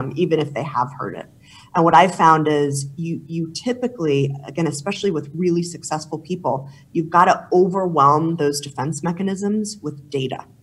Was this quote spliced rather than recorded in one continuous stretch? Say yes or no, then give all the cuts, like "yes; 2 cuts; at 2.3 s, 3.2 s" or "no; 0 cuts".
no; 0 cuts